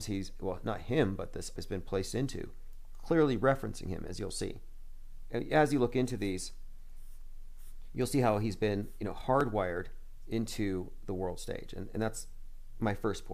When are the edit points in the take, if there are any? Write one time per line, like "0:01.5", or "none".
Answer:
0:01.6